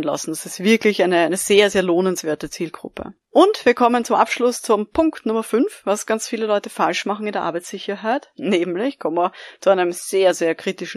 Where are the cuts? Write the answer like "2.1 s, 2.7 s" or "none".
3.2 s